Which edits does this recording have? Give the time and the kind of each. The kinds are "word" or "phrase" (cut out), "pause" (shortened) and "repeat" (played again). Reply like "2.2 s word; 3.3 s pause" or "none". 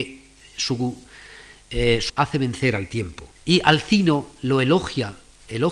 2.1 s word; 3.4 s pause

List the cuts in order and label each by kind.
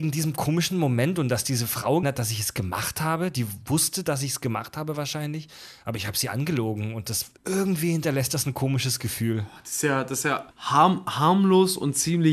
2.0 s word; 7.4 s word; 10.5 s pause

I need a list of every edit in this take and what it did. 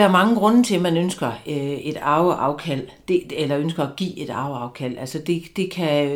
none

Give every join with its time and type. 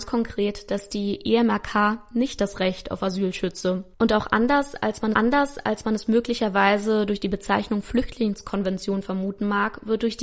3.9 s pause; 5.1 s repeat

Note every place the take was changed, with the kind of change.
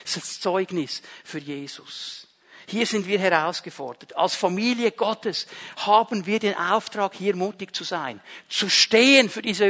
none

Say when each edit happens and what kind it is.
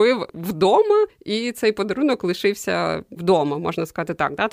3.2 s phrase

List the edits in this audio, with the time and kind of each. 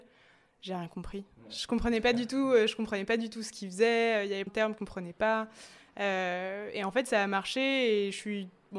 4.5 s word; 4.8 s word

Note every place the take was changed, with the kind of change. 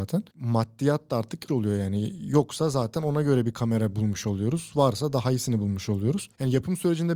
1.5 s word

